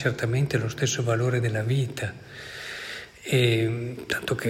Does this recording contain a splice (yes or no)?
no